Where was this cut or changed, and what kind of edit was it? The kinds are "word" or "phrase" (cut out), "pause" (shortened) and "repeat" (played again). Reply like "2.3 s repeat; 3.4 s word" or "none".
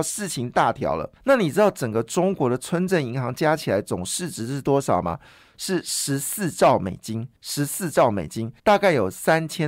1.2 s pause; 7.4 s pause; 8.6 s pause